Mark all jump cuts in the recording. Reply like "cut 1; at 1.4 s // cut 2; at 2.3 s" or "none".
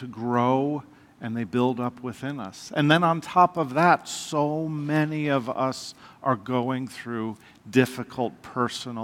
none

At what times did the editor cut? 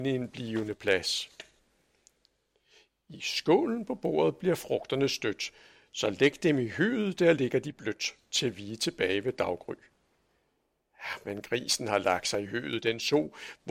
none

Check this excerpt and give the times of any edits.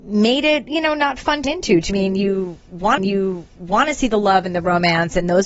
cut 1; at 1.4 s // cut 2; at 1.9 s // cut 3; at 3.0 s

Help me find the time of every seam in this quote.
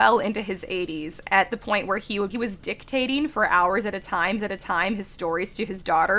cut 1; at 2.3 s // cut 2; at 4.4 s

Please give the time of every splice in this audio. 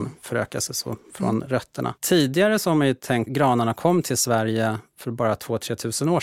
cut 1; at 2.0 s // cut 2; at 3.3 s

